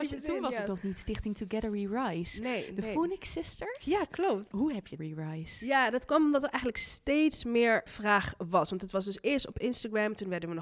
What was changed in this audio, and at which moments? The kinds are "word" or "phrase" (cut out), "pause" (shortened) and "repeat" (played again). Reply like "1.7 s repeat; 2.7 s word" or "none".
5.0 s phrase; 7.9 s word